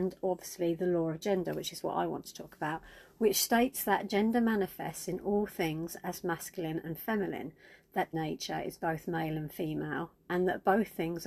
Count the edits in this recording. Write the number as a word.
one